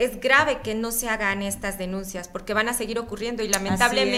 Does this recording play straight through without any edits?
yes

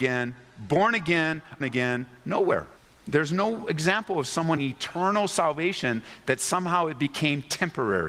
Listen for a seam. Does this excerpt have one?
yes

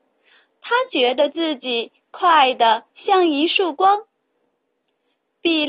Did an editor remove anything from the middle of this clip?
no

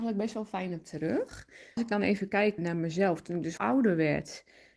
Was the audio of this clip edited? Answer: yes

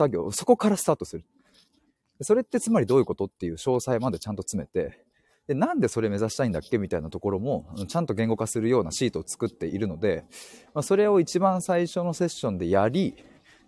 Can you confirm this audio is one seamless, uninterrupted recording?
yes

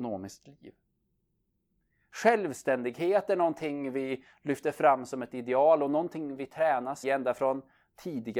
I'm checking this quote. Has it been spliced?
yes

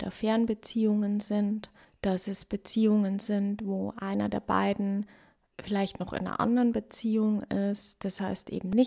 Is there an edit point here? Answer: no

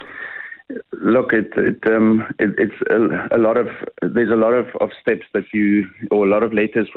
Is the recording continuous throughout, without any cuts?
yes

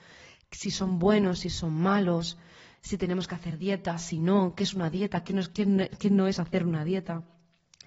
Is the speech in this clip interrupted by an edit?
no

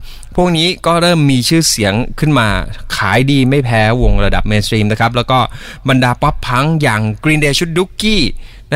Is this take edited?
no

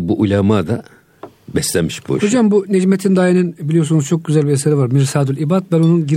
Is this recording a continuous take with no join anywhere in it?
yes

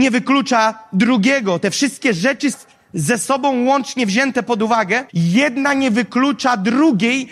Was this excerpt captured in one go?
no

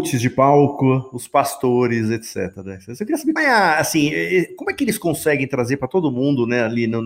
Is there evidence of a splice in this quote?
yes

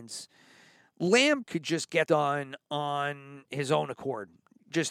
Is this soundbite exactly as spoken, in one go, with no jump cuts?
no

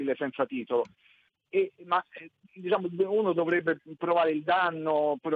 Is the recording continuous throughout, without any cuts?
no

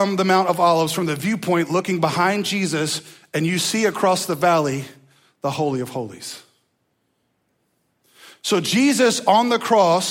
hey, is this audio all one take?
yes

